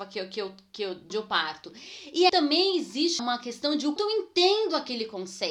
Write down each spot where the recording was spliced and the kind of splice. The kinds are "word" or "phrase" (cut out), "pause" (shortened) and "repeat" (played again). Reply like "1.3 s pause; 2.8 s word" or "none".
1.1 s word; 2.3 s word; 3.2 s word; 4.0 s word